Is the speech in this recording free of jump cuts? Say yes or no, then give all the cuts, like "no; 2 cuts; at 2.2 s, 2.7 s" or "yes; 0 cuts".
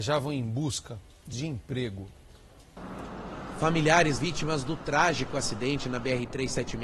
no; 2 cuts; at 1.3 s, 4.2 s